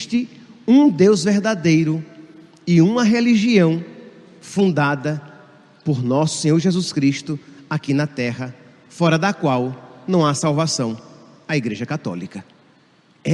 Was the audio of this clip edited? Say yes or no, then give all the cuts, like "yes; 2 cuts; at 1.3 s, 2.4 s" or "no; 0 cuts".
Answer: no; 0 cuts